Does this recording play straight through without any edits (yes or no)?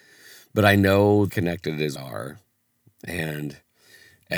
no